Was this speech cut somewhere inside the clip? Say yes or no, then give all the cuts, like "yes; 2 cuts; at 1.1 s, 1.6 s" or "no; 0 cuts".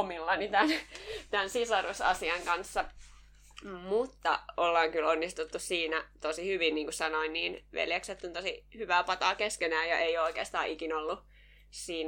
no; 0 cuts